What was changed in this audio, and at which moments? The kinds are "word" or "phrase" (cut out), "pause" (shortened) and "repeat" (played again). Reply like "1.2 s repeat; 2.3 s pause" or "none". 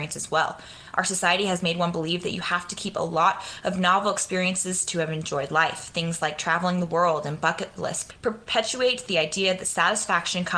none